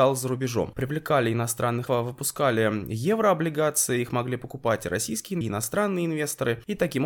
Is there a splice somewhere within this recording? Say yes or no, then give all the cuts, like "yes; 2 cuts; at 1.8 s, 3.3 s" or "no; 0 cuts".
yes; 2 cuts; at 1.9 s, 5.4 s